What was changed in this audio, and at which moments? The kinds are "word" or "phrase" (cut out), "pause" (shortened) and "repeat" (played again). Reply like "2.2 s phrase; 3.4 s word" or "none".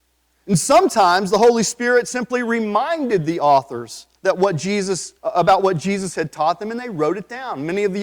4.2 s pause; 5.2 s pause

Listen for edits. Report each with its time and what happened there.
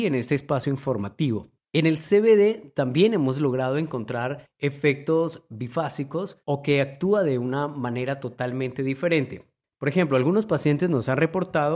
6.4 s pause

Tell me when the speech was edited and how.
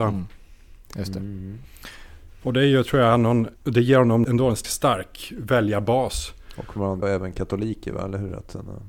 3.6 s word; 4.2 s word; 4.6 s word; 7.0 s word

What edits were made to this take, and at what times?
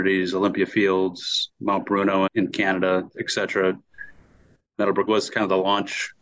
2.3 s word; 5.1 s word

